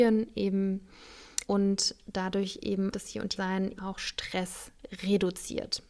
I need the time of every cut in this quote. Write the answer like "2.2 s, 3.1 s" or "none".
1.4 s, 2.9 s, 3.4 s, 3.8 s